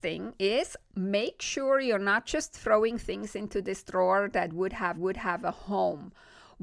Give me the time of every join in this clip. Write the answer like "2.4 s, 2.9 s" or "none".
4.9 s